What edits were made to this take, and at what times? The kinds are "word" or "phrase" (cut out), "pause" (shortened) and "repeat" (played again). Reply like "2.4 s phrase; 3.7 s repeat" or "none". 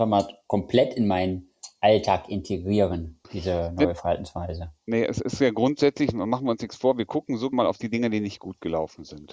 3.2 s pause; 4.8 s pause; 7.5 s word